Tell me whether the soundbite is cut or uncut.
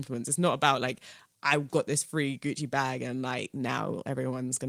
uncut